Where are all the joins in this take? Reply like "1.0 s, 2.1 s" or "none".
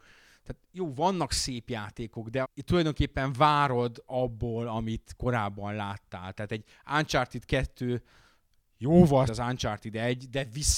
2.4 s, 9.3 s